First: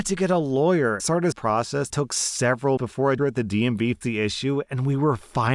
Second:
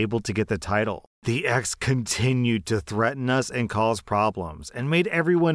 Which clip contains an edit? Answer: first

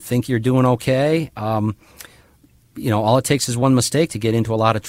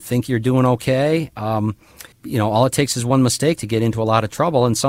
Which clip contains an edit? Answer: second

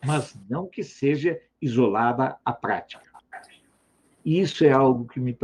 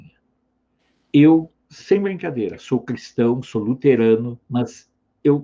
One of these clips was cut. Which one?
second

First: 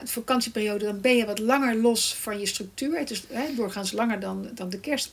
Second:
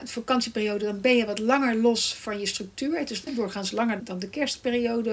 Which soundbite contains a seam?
second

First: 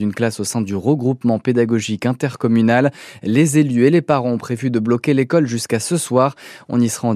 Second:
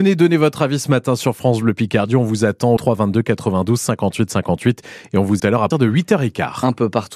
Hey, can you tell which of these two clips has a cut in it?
second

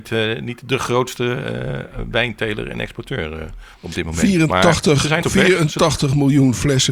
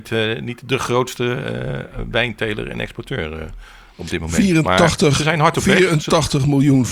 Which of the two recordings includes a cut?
first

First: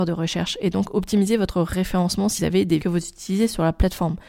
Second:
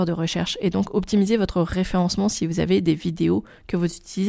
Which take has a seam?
first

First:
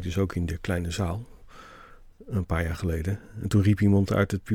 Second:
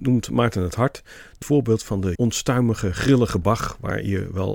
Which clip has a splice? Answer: second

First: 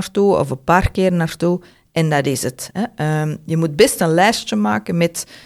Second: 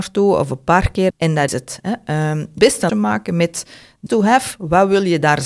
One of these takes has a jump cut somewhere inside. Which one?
second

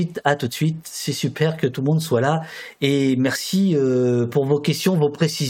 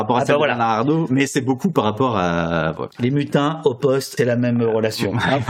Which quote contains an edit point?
second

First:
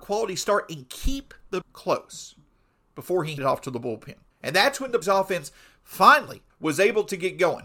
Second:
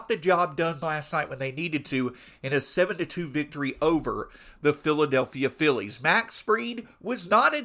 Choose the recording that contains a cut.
first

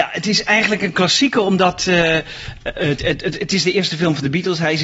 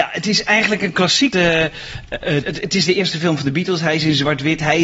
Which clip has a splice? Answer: second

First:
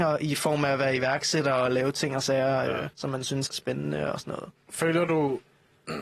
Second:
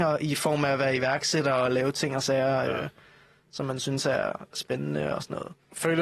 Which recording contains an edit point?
first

